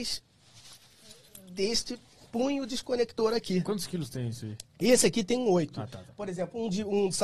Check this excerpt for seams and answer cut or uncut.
uncut